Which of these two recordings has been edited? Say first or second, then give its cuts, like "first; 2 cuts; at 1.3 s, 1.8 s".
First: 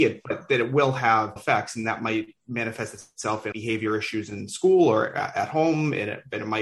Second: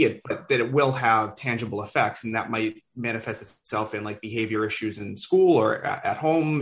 first; 2 cuts; at 1.4 s, 3.5 s